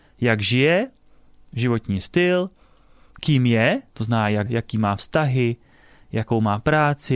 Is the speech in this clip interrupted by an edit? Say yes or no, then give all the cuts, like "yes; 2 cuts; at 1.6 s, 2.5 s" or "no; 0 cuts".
yes; 1 cut; at 4.5 s